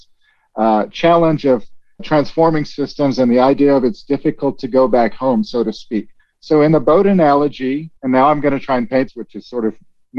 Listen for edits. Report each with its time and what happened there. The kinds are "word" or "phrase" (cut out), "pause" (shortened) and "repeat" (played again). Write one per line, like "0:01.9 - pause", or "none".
0:02.0 - word
0:06.2 - pause
0:08.0 - pause
0:09.1 - phrase